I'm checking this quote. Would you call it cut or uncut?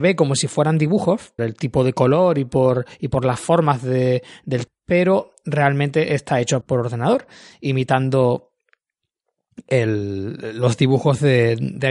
cut